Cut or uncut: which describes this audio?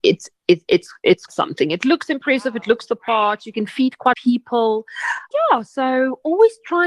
cut